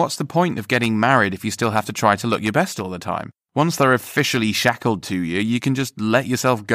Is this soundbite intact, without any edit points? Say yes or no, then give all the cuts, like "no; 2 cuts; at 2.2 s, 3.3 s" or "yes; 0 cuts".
yes; 0 cuts